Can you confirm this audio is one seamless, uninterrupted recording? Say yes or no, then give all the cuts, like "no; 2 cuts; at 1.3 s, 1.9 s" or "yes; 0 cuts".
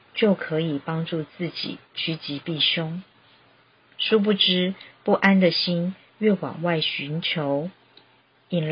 yes; 0 cuts